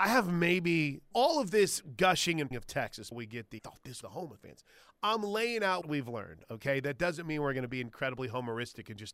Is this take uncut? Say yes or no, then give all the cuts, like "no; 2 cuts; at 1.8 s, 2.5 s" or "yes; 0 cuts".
no; 7 cuts; at 1.1 s, 2.5 s, 3.1 s, 3.6 s, 4.0 s, 4.4 s, 5.8 s